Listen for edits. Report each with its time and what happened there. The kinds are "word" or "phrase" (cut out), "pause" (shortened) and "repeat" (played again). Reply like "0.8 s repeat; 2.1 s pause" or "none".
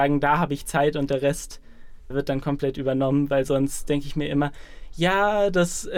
2.1 s word